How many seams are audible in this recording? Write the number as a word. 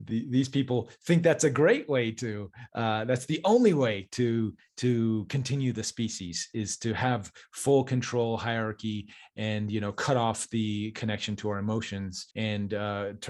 one